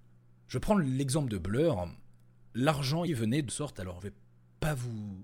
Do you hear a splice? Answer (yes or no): yes